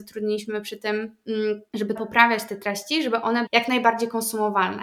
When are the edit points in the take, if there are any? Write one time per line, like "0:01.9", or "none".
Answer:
0:02.0
0:03.5